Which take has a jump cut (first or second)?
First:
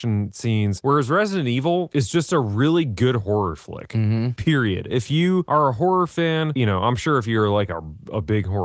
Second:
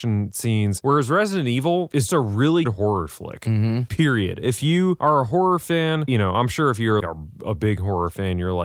second